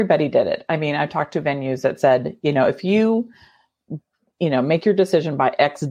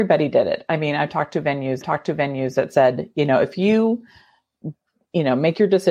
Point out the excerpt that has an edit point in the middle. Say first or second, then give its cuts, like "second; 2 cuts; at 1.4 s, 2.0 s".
second; 1 cut; at 1.8 s